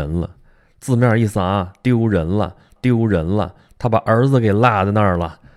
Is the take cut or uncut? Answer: cut